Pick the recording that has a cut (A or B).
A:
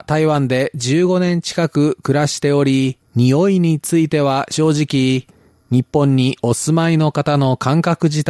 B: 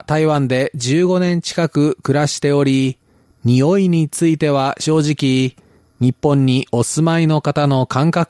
A